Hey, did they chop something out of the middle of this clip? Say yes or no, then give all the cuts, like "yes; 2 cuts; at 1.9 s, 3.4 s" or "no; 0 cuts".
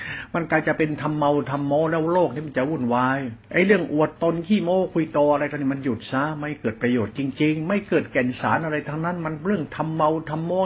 yes; 1 cut; at 3.4 s